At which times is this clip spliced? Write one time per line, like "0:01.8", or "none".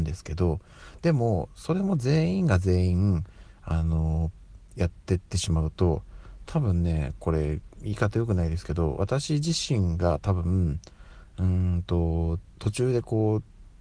0:12.5